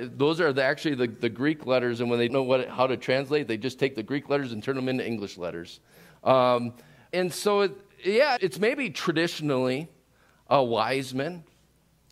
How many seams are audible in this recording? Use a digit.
3